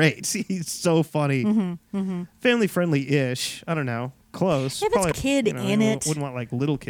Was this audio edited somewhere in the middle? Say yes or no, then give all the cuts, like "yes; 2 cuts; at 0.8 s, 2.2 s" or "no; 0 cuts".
yes; 1 cut; at 5.1 s